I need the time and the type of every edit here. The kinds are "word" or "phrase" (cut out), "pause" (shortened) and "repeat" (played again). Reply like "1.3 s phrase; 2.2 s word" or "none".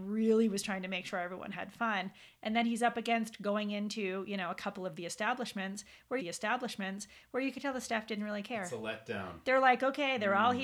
6.2 s repeat